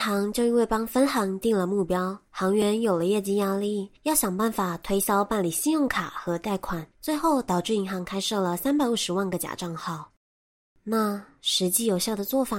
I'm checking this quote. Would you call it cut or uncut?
cut